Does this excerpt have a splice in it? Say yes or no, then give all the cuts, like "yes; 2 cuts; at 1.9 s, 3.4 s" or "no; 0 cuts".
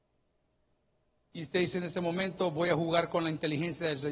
no; 0 cuts